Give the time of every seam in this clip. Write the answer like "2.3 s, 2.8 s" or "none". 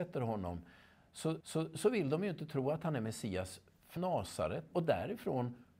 1.4 s, 4.0 s, 4.7 s